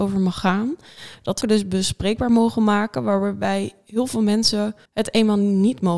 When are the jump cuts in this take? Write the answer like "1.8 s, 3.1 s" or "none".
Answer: 1.4 s, 4.9 s